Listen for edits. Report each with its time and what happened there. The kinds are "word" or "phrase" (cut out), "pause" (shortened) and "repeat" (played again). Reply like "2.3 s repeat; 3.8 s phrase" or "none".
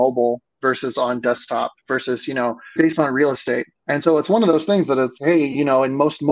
2.8 s word; 3.8 s pause; 5.2 s word